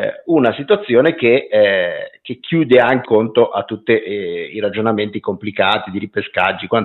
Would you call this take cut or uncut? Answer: cut